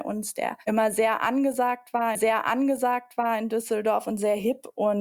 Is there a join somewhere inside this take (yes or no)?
yes